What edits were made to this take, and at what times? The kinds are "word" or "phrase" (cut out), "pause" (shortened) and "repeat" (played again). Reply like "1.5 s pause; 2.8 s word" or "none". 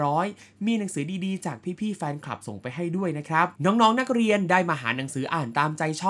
3.6 s pause